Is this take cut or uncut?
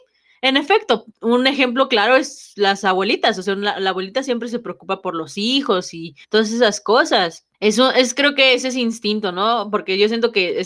cut